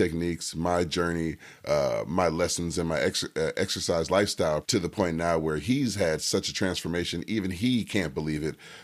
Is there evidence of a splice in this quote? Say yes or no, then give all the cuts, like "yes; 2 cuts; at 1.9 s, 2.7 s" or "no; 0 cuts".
yes; 1 cut; at 4.6 s